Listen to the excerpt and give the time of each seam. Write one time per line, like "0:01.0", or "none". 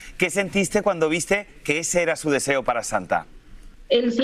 none